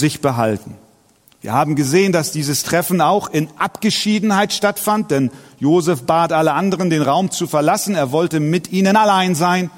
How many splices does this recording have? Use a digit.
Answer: 0